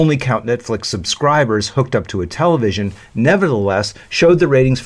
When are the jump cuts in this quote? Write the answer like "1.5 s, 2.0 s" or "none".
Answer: none